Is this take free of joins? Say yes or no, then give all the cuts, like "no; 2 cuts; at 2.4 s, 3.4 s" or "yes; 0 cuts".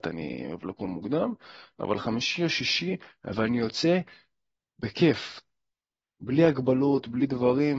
yes; 0 cuts